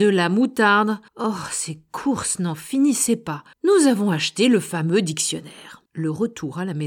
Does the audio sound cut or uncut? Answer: cut